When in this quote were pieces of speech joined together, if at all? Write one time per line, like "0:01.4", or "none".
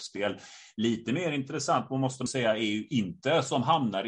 0:02.3